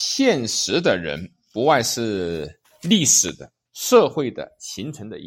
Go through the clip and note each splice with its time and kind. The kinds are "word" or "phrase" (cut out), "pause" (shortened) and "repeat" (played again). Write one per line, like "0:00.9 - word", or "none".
0:02.6 - pause
0:03.6 - pause